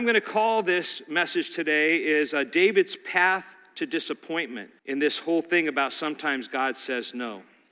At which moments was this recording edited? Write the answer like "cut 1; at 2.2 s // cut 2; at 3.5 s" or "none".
cut 1; at 4.8 s